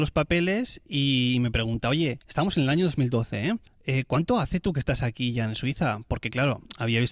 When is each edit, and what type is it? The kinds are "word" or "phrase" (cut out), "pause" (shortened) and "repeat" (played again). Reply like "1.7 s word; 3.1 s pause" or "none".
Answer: 2.2 s pause; 3.7 s pause